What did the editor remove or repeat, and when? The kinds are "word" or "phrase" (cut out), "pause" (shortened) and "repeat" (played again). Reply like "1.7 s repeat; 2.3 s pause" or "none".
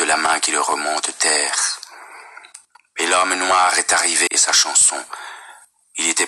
1.1 s phrase; 4.3 s phrase